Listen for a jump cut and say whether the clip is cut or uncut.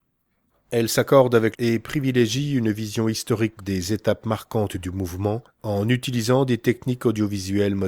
cut